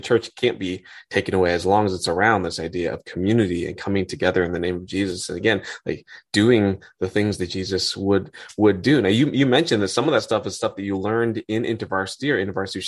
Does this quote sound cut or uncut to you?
uncut